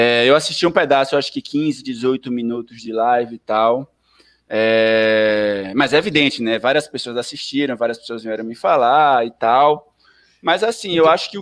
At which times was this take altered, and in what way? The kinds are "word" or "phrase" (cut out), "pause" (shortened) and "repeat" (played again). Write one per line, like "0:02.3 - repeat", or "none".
none

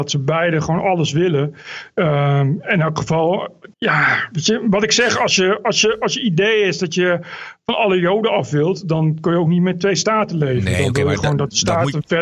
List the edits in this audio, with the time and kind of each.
0:03.7 - pause

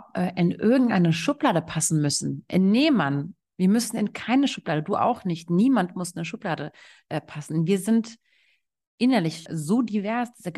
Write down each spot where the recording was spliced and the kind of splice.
0:09.5 - word

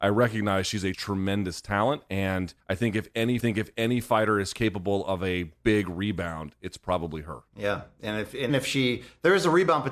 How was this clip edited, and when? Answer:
0:00.9 - word
0:02.6 - pause
0:03.4 - repeat
0:07.5 - pause
0:08.5 - word

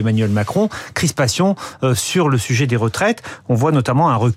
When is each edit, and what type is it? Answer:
none

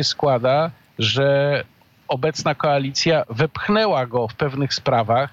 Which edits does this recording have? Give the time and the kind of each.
none

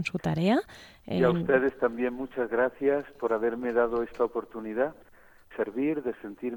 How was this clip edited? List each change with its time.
0:05.5 - word

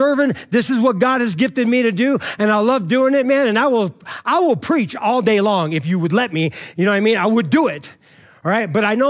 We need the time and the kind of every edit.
none

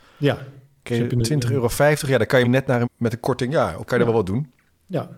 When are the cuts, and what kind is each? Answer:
0:02.4 - word
0:02.8 - word
0:03.9 - word

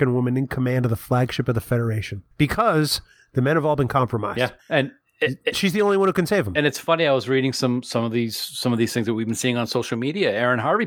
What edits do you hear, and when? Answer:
0:02.3 - pause
0:04.6 - pause

